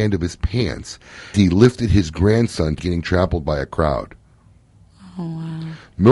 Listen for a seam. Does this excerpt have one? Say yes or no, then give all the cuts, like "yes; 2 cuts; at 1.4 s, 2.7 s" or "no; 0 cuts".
yes; 2 cuts; at 1.3 s, 2.8 s